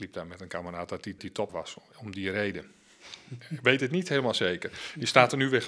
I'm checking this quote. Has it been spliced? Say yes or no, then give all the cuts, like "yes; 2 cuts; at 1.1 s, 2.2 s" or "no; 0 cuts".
yes; 2 cuts; at 1.2 s, 1.5 s